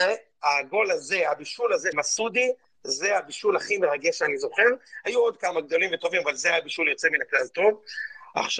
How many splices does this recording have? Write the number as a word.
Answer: one